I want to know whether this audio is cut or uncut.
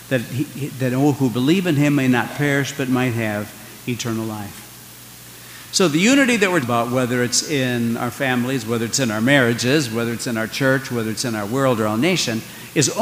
cut